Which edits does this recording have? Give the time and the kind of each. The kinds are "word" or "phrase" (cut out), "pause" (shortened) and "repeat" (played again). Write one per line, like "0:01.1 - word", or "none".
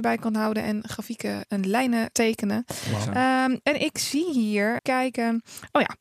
0:02.1 - word
0:04.8 - word